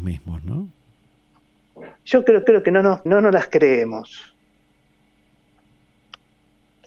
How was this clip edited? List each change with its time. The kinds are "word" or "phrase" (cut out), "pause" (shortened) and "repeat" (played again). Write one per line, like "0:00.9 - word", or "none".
0:02.0 - pause
0:02.4 - repeat
0:03.1 - word